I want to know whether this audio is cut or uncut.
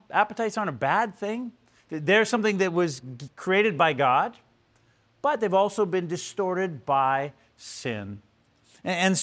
uncut